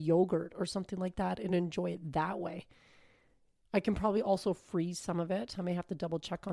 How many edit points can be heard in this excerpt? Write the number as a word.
zero